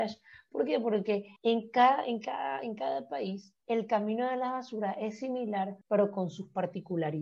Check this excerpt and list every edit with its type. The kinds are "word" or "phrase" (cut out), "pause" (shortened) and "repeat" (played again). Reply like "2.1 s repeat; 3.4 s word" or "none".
1.4 s pause; 3.6 s pause; 5.8 s pause